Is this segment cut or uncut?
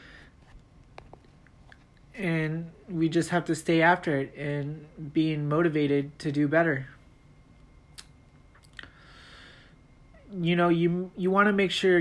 uncut